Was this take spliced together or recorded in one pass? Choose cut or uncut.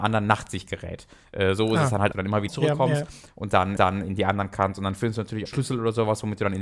cut